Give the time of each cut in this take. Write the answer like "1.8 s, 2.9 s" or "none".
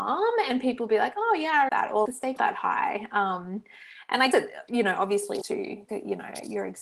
1.7 s, 2.1 s, 2.4 s, 4.3 s, 5.4 s, 5.9 s

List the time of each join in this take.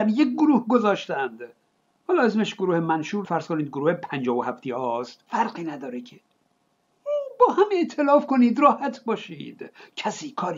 3.2 s

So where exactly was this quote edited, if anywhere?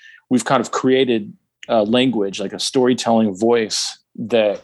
none

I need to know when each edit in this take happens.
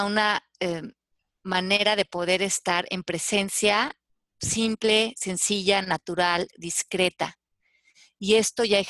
none

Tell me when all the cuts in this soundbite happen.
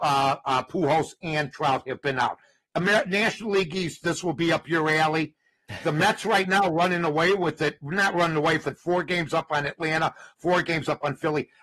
none

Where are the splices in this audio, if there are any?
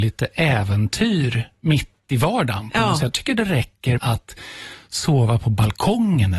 3.1 s, 4.0 s

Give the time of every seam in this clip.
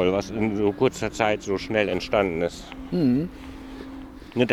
none

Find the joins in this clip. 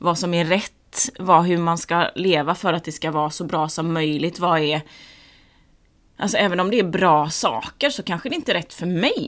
none

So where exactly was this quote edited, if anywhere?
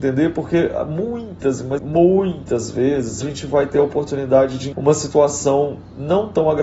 1.8 s, 3.2 s, 4.7 s

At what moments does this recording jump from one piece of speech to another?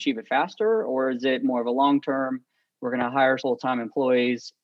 3.4 s

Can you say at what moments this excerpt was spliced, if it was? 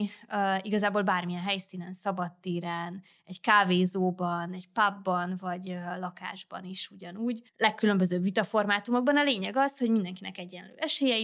7.5 s

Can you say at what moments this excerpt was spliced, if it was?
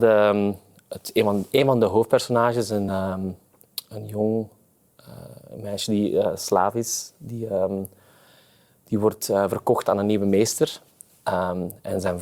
none

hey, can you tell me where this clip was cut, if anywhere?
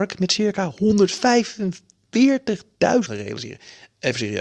3.1 s

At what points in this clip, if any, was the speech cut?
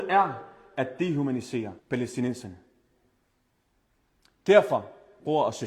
1.8 s

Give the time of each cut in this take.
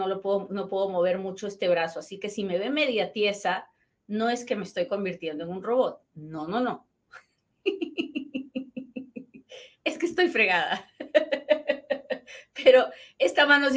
none

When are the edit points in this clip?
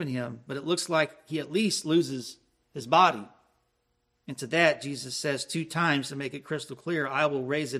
none

